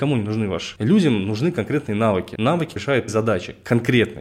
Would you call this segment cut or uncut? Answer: cut